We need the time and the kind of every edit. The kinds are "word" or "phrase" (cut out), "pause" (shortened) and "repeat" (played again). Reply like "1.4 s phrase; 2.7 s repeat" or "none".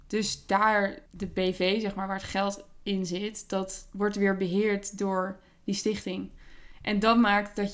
1.1 s word